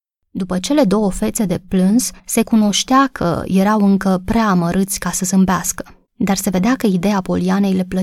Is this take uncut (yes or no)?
no